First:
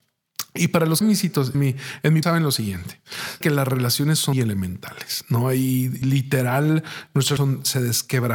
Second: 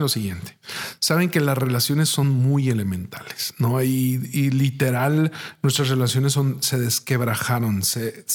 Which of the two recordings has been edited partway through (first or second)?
first